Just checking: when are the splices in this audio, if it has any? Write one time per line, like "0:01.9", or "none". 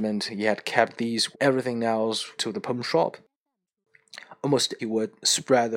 0:01.3
0:02.4
0:04.8

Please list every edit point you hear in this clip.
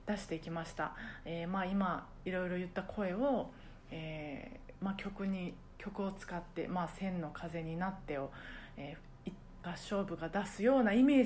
0:09.6

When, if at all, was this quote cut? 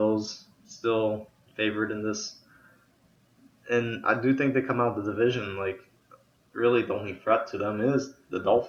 none

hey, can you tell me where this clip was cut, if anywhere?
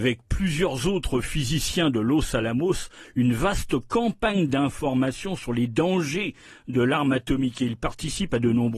none

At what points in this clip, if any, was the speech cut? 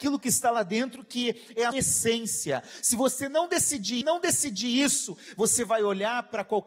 0:01.7
0:04.0

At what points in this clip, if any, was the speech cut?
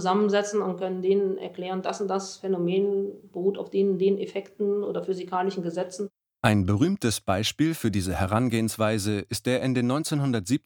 none

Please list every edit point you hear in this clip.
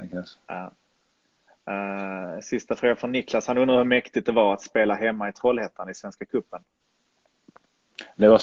none

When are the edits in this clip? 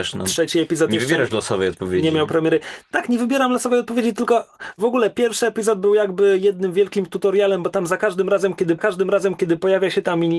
0:08.8

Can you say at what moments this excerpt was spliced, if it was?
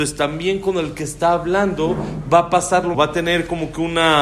0:02.9

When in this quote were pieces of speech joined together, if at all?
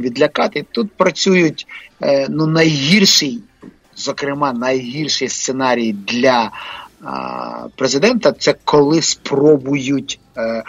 0:01.9

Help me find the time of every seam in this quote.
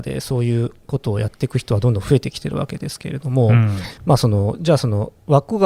0:04.0

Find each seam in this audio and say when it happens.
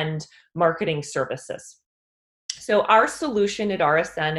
none

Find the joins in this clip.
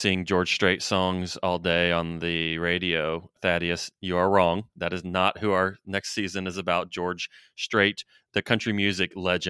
none

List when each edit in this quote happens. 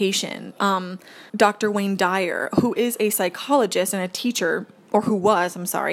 0:01.3

